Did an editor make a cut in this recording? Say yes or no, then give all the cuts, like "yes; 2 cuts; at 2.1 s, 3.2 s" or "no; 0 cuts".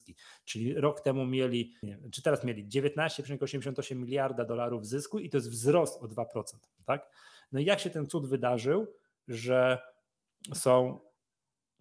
yes; 1 cut; at 1.8 s